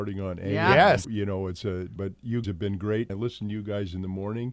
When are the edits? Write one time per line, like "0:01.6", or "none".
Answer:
0:01.0
0:02.0
0:02.4
0:03.1